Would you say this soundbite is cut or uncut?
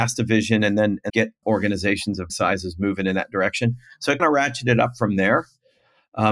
cut